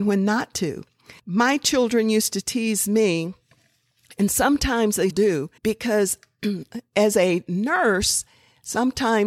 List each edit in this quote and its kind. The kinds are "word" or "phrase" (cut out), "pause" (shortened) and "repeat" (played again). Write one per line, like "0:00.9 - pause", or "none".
0:01.2 - pause
0:05.1 - word
0:05.6 - pause